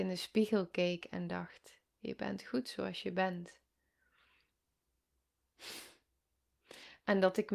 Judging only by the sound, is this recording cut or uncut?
uncut